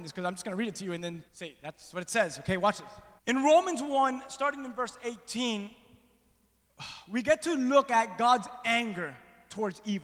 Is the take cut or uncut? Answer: cut